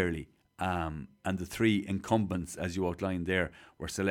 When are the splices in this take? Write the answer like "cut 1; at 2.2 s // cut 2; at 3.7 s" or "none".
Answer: none